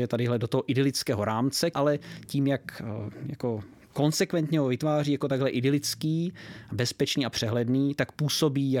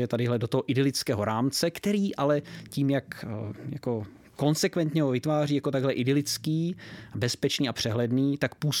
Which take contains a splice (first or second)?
first